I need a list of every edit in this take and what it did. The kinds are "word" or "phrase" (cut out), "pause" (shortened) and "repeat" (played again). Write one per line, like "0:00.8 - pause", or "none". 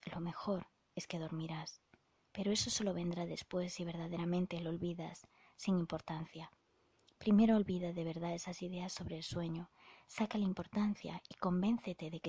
none